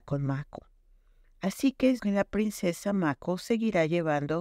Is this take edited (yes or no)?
yes